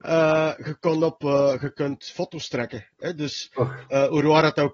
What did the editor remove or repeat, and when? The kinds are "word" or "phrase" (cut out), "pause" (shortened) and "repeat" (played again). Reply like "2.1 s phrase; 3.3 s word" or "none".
none